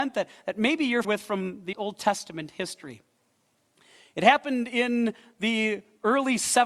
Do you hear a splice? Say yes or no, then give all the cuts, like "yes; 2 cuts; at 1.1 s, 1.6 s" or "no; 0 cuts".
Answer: yes; 2 cuts; at 1.0 s, 1.7 s